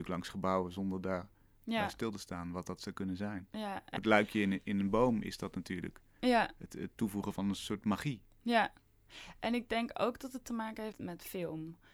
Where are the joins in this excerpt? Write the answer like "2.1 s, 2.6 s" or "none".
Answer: 4.0 s, 6.9 s, 10.9 s